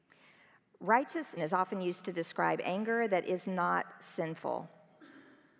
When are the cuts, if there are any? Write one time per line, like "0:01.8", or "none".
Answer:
0:01.4